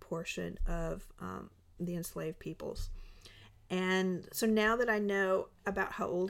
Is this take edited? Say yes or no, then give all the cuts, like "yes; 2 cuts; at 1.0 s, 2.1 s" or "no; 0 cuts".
no; 0 cuts